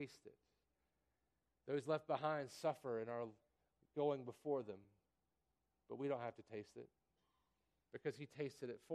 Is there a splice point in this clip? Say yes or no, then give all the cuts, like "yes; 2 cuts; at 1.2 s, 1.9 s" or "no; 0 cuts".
no; 0 cuts